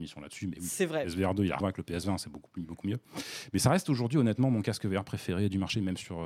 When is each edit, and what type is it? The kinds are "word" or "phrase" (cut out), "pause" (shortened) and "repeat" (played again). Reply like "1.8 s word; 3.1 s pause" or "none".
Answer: 1.6 s phrase